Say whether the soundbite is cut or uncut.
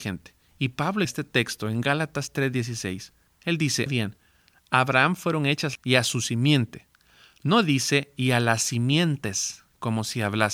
cut